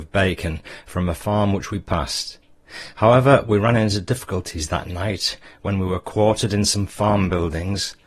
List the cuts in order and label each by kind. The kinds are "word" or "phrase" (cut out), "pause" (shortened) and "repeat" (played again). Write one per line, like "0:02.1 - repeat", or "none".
none